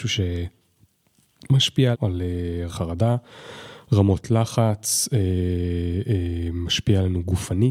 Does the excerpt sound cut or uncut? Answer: cut